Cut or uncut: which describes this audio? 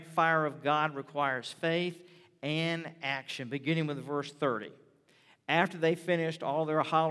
uncut